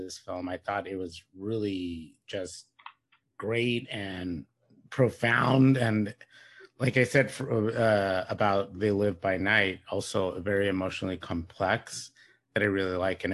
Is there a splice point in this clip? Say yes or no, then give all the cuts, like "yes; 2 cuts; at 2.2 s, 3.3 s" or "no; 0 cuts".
no; 0 cuts